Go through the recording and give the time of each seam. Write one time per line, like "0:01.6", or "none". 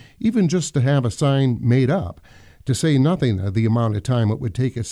none